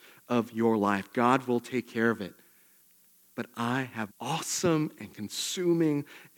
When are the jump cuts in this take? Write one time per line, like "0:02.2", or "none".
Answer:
0:04.1